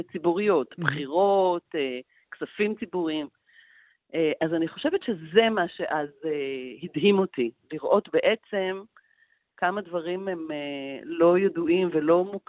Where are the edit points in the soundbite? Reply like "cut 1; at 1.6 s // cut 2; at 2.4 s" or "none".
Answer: none